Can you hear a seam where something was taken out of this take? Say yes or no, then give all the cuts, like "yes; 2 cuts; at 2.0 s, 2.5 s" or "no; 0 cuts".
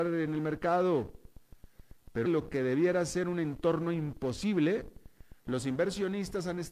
yes; 1 cut; at 2.3 s